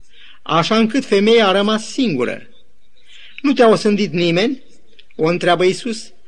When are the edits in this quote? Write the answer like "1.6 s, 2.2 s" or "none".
none